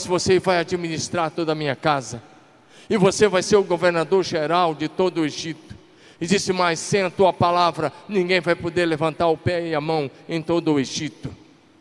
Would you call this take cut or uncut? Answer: uncut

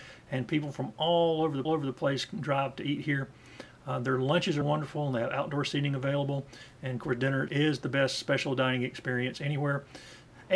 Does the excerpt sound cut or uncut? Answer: cut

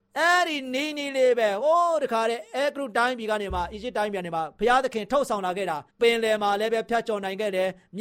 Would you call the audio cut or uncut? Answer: cut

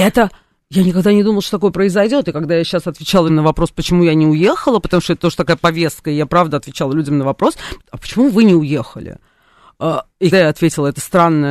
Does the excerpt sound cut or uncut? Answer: cut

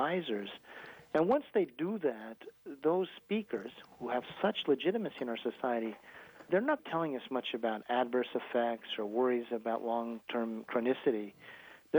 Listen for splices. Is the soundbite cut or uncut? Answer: cut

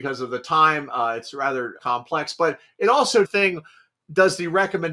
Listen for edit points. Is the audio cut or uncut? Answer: cut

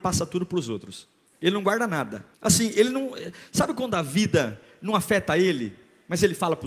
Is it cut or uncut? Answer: cut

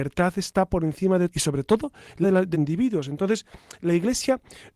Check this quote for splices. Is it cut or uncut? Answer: cut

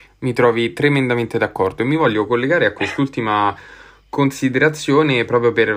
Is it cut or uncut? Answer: uncut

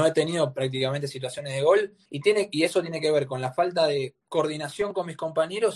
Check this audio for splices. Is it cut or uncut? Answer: cut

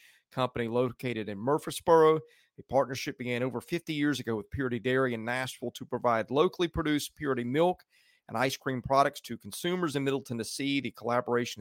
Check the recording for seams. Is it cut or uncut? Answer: uncut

